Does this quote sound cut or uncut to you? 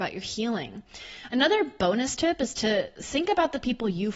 uncut